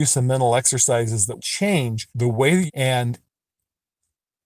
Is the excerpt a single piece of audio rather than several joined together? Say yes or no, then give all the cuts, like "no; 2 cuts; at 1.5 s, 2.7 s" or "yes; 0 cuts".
no; 3 cuts; at 1.4 s, 2.1 s, 2.7 s